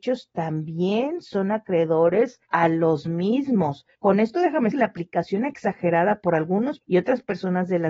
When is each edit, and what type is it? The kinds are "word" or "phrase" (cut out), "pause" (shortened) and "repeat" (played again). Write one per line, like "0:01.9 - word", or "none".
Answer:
0:02.4 - pause
0:03.9 - pause
0:04.7 - word
0:06.8 - word